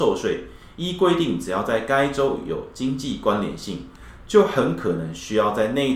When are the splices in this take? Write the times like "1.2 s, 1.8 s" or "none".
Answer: none